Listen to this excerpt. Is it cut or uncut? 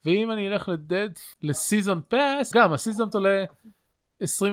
cut